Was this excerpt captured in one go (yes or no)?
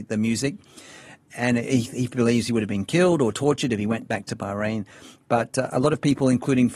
yes